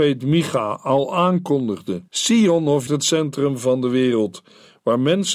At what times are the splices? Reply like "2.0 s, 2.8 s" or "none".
2.1 s, 2.9 s